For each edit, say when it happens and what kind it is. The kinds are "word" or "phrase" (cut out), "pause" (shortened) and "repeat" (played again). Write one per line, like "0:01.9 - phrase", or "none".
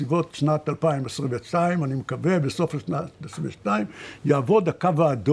none